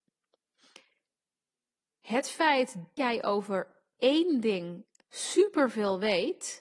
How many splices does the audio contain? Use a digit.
1